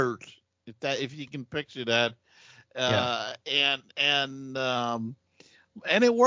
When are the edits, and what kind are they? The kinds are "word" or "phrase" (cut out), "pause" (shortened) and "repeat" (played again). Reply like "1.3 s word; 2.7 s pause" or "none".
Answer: none